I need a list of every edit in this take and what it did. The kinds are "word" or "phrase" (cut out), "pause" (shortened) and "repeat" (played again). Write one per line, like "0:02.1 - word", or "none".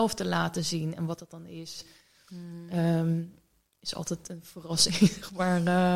none